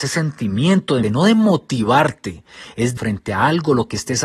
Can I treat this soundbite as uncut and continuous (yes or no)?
no